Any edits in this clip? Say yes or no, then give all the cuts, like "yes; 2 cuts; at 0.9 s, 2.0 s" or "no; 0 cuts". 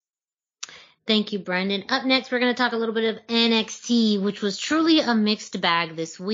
no; 0 cuts